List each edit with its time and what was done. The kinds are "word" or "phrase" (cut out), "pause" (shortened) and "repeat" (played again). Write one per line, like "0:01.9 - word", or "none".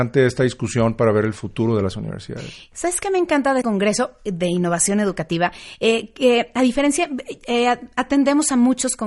0:03.6 - word